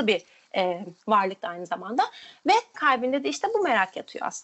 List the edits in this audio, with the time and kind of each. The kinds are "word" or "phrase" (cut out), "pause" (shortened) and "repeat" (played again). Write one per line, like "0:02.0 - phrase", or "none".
0:01.0 - pause
0:02.7 - word